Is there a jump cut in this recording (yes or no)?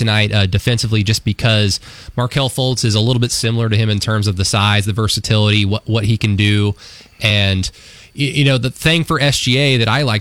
no